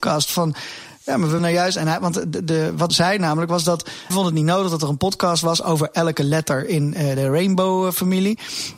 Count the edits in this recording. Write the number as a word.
three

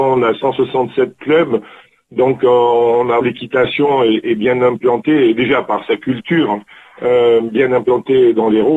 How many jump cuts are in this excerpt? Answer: two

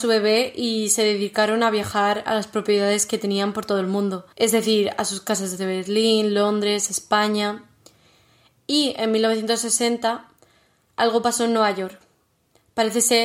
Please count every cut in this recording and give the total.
one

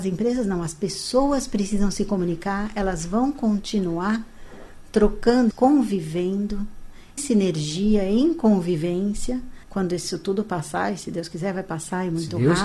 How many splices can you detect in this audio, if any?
three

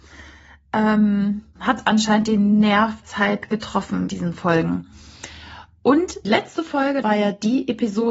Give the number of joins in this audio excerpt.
five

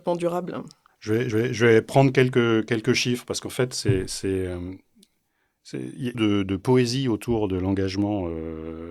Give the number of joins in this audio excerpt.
two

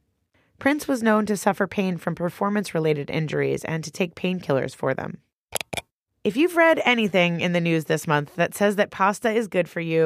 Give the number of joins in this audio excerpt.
zero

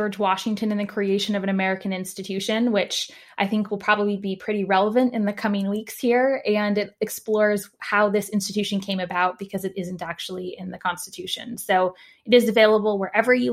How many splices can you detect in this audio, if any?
zero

